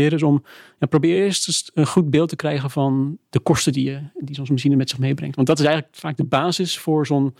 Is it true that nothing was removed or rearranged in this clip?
yes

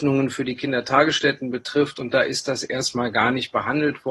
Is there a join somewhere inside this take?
no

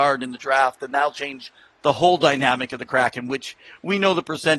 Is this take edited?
no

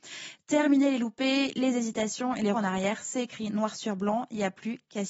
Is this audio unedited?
no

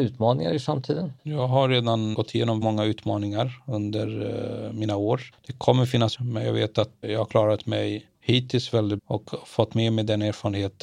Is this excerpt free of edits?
no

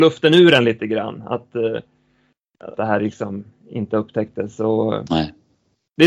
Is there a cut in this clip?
yes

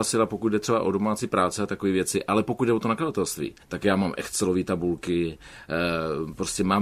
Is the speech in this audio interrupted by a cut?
yes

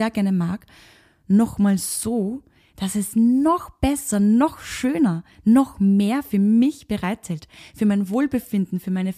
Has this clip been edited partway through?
no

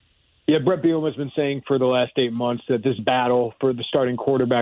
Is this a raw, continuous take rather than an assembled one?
no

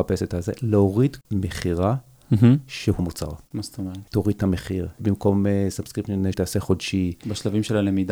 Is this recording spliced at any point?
yes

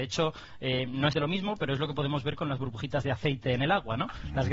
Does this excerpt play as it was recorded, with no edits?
no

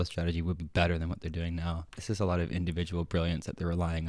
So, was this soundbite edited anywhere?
no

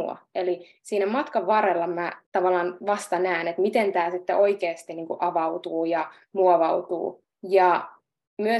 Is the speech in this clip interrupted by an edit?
yes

